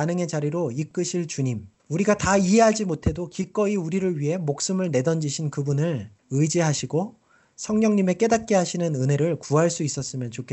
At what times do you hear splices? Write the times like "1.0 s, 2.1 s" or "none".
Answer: 1.8 s, 6.2 s